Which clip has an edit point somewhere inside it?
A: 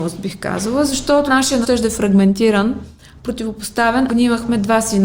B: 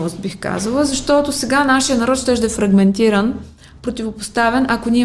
A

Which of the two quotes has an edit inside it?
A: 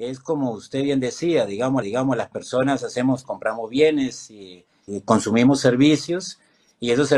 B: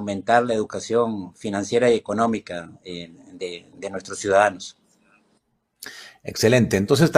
A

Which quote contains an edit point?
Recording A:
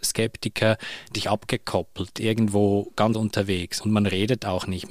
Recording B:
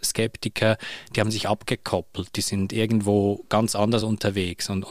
A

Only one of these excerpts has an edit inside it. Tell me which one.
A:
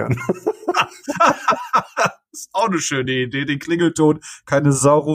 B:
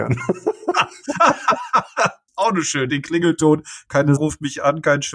B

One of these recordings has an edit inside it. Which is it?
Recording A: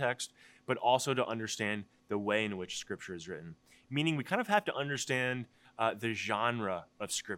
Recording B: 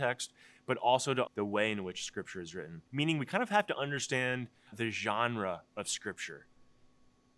B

